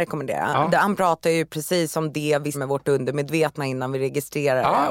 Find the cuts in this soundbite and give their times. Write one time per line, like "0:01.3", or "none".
0:02.5